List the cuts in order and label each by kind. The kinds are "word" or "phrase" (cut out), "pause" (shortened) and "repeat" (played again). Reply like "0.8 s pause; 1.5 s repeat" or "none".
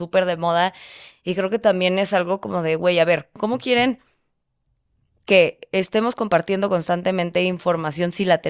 none